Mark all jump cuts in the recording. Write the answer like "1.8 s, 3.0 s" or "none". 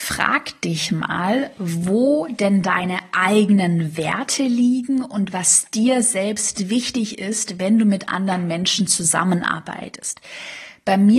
none